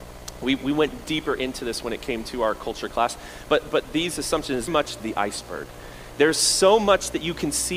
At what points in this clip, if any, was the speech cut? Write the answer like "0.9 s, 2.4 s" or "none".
4.7 s, 5.0 s